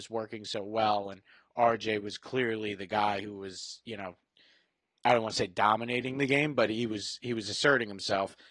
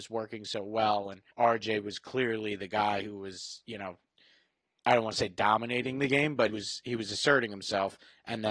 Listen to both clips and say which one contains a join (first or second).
second